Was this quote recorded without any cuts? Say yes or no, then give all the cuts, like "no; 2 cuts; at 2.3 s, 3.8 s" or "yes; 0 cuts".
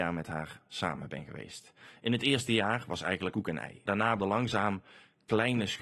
no; 3 cuts; at 3.3 s, 3.9 s, 4.2 s